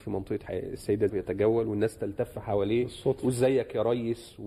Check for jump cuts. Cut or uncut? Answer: cut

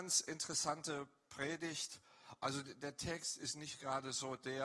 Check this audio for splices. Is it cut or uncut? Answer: uncut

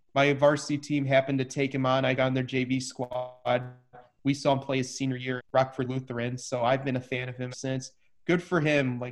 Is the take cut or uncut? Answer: cut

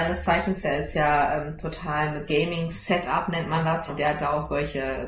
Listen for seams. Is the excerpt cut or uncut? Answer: cut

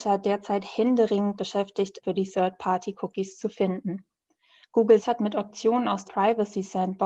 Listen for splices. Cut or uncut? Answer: cut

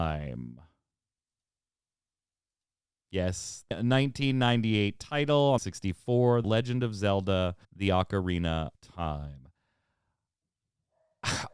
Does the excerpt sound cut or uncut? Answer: cut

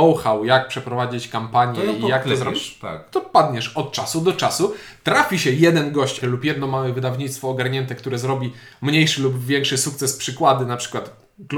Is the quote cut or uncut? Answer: cut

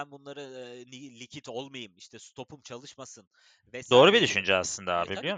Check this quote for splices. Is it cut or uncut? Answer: uncut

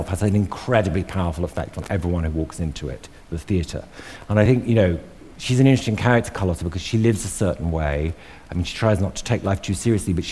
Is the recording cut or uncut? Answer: uncut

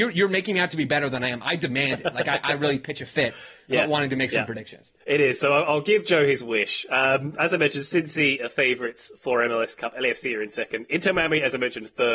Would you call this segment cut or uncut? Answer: cut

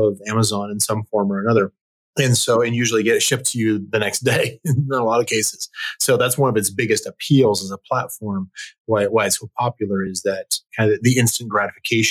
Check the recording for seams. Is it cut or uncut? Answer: uncut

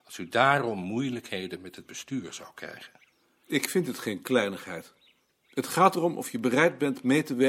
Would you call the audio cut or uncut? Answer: uncut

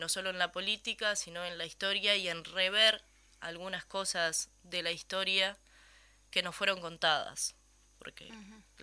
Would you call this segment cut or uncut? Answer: uncut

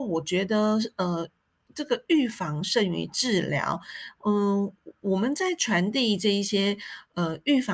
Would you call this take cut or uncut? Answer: uncut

